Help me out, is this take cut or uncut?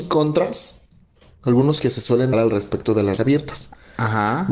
cut